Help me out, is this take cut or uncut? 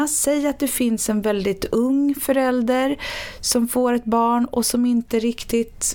uncut